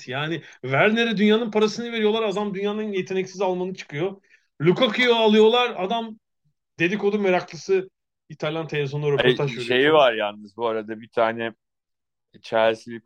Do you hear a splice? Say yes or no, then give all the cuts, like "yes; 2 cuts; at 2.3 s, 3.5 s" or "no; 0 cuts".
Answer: no; 0 cuts